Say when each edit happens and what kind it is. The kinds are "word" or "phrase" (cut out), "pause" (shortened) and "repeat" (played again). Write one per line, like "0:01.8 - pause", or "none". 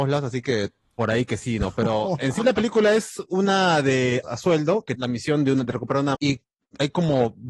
0:04.2 - word
0:05.0 - word
0:06.1 - word